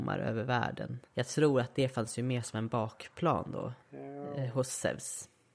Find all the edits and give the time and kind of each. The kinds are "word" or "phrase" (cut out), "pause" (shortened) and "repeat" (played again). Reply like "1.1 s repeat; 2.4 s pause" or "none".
1.1 s pause; 3.8 s pause